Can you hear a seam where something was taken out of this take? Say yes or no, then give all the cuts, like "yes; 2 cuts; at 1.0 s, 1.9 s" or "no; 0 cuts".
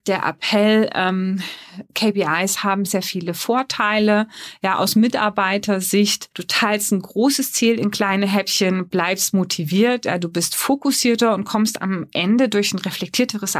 yes; 3 cuts; at 1.9 s, 2.9 s, 6.3 s